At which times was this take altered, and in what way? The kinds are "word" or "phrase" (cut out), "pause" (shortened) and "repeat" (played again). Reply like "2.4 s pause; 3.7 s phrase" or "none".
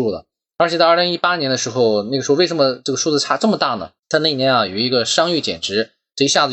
4.0 s pause